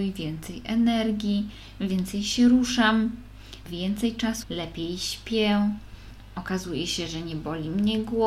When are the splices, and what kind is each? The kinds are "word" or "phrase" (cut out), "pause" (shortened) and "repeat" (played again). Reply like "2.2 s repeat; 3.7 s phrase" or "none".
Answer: 3.6 s word; 4.4 s phrase